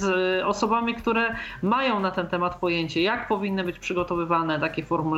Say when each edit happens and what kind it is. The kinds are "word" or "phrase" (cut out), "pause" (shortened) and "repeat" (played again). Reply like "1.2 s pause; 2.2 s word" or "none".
none